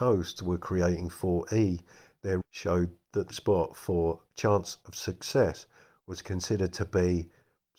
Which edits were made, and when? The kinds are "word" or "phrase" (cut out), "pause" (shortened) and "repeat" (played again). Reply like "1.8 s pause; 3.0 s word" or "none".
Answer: 2.4 s word; 3.3 s word